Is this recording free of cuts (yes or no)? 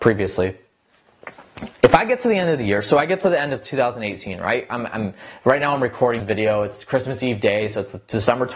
no